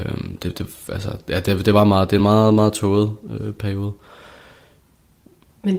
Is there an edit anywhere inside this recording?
no; 0 cuts

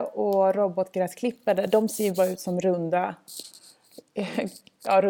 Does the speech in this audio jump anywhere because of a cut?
no; 0 cuts

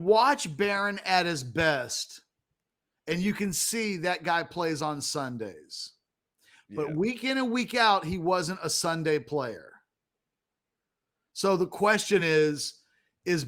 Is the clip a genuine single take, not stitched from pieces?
yes; 0 cuts

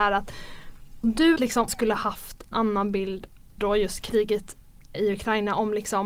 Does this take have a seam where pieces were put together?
yes; 6 cuts; at 1.0 s, 1.4 s, 1.7 s, 2.5 s, 3.6 s, 4.9 s

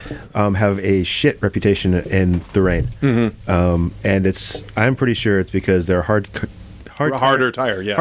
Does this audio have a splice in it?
no; 0 cuts

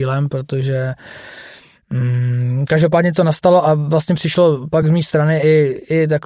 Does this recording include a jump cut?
no; 0 cuts

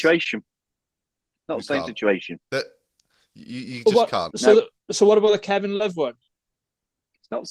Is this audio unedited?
no; 1 cut; at 2.4 s

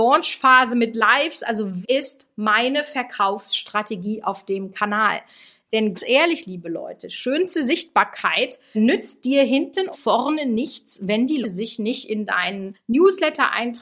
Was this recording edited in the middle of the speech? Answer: yes; 6 cuts; at 1.8 s, 5.9 s, 8.7 s, 9.9 s, 11.4 s, 12.7 s

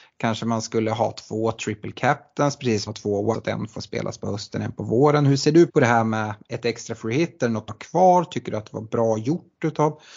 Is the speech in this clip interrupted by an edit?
yes; 4 cuts; at 2.9 s, 3.3 s, 5.7 s, 7.7 s

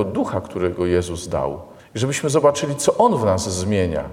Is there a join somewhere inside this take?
yes; 1 cut; at 1.8 s

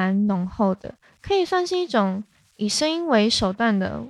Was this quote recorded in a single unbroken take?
yes; 0 cuts

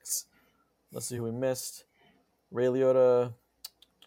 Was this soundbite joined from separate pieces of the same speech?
no; 0 cuts

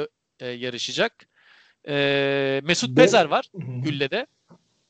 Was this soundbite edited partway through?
no; 0 cuts

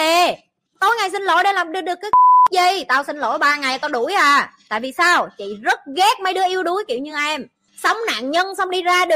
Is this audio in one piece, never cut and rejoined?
yes; 0 cuts

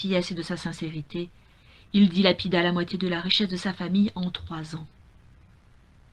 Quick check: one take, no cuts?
yes; 0 cuts

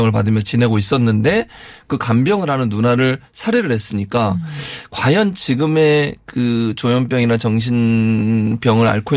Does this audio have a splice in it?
no; 0 cuts

